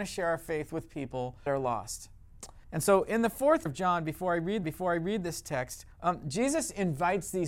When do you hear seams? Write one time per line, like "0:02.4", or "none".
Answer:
0:01.5
0:02.6
0:03.7
0:04.6
0:05.9